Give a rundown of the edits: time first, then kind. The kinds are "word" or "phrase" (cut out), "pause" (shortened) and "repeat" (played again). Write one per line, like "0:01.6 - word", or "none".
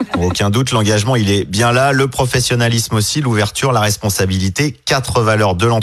none

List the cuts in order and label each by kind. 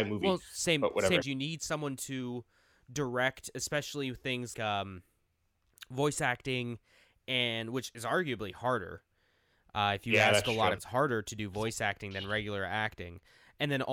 0:01.2 - phrase
0:04.5 - word
0:10.8 - word

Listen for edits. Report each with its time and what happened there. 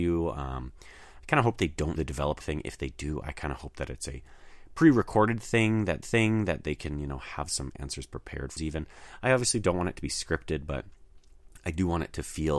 0:02.0 - word
0:02.4 - word
0:06.0 - repeat
0:08.6 - phrase

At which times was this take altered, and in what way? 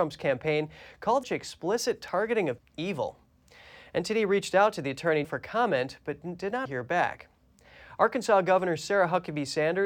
0:01.2 - word
0:02.6 - word
0:05.2 - word
0:06.7 - word

